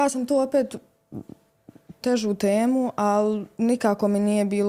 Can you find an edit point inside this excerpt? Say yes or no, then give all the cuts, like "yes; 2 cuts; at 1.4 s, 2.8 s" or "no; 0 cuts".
yes; 1 cut; at 2.0 s